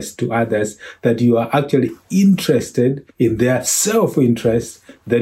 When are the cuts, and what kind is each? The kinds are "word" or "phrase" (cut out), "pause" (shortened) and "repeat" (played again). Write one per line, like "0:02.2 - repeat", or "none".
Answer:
0:03.1 - pause